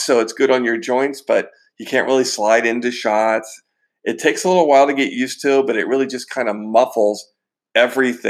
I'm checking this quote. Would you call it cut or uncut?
uncut